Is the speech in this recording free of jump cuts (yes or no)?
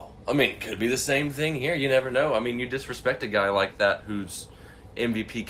yes